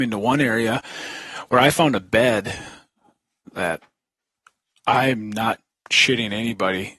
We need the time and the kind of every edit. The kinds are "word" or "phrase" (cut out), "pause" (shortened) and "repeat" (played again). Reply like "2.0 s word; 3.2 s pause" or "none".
none